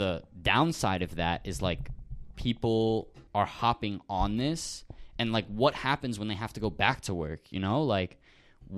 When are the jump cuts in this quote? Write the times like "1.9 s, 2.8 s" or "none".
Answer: 3.3 s